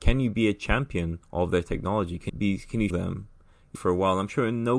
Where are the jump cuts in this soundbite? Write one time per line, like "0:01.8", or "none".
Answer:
0:01.2
0:02.3
0:02.9
0:03.7